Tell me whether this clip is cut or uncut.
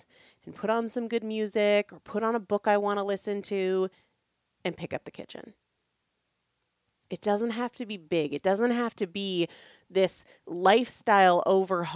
uncut